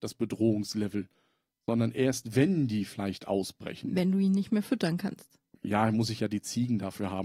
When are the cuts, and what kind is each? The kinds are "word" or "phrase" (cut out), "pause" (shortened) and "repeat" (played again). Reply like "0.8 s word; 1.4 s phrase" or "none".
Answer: none